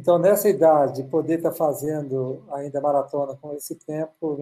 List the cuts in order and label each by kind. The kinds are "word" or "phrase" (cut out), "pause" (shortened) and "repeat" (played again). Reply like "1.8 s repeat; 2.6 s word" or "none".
none